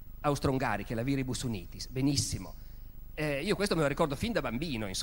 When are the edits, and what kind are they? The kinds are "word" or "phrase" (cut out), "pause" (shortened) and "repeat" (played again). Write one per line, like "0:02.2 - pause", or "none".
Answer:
none